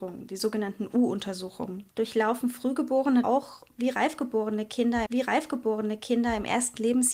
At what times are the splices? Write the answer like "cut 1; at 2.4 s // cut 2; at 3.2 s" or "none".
cut 1; at 1.9 s // cut 2; at 3.2 s // cut 3; at 5.1 s